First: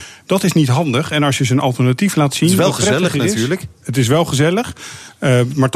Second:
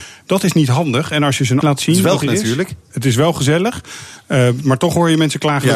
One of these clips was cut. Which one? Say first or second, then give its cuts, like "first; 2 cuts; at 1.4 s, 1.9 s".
second; 2 cuts; at 1.6 s, 2.2 s